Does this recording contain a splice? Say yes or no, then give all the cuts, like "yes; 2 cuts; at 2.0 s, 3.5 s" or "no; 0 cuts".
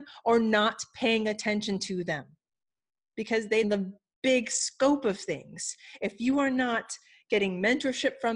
yes; 1 cut; at 3.6 s